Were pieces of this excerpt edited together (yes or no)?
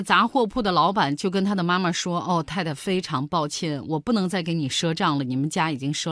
no